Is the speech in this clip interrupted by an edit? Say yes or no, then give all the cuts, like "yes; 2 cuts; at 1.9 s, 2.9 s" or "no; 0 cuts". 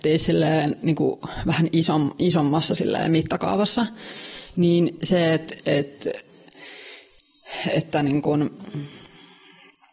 yes; 1 cut; at 5.6 s